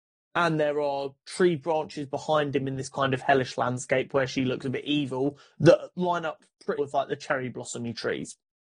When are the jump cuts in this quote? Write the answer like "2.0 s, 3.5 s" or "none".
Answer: 6.8 s